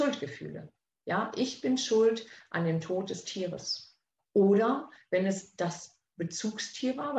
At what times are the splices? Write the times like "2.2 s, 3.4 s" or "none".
4.2 s